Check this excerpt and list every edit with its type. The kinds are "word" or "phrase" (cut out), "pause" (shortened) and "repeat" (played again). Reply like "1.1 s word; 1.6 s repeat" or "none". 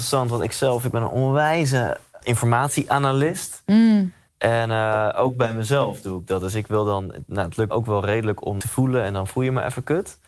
2.2 s word; 4.3 s pause; 7.7 s word; 8.6 s phrase